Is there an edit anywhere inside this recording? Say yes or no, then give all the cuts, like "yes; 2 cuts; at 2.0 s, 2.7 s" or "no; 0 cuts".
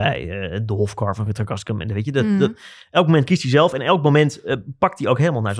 no; 0 cuts